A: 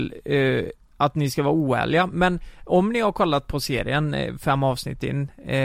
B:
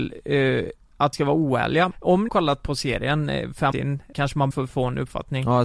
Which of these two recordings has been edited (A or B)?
B